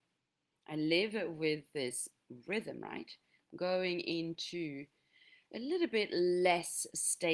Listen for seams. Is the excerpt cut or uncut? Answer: uncut